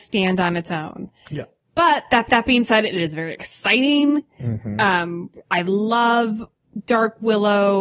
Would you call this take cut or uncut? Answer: cut